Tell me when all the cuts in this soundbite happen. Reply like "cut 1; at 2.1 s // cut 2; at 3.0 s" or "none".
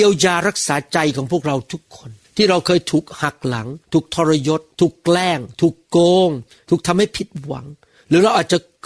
cut 1; at 2.2 s // cut 2; at 3.8 s // cut 3; at 4.7 s // cut 4; at 6.6 s